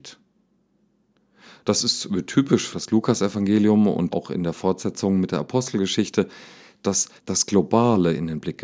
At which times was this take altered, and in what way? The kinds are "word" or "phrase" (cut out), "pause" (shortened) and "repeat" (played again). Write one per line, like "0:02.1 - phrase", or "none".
0:02.7 - word
0:04.1 - word
0:07.2 - word